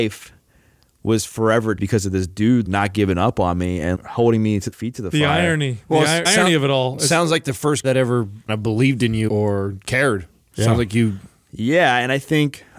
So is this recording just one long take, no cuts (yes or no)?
no